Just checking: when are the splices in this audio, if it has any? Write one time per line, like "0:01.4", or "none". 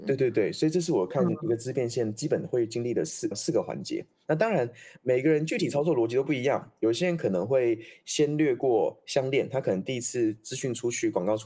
0:03.3